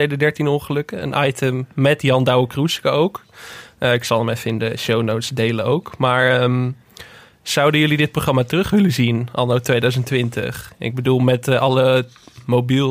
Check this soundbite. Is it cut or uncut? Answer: uncut